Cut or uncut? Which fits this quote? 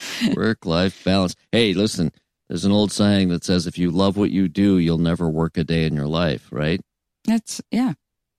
uncut